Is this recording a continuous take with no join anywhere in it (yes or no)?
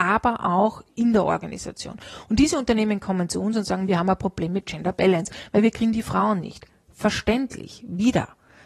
yes